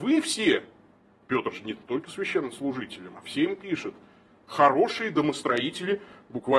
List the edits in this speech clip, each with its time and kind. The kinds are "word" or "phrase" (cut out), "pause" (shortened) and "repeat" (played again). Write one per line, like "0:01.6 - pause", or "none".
none

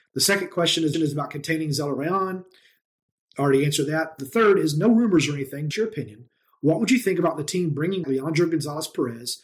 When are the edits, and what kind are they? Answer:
0:00.9 - repeat
0:05.7 - word
0:08.0 - word

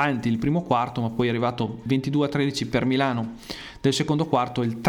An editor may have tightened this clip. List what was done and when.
0:01.9 - word

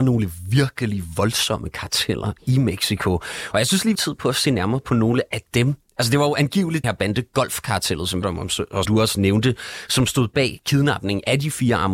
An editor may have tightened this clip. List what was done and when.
0:03.9 - phrase
0:06.8 - word
0:08.2 - phrase
0:08.8 - word

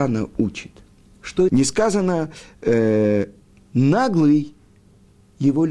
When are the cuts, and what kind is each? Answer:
0:01.5 - phrase
0:03.6 - pause

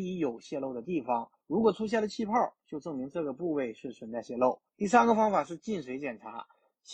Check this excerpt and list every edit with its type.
0:01.4 - pause
0:04.7 - pause

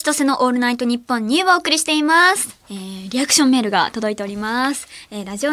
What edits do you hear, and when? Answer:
0:02.6 - pause

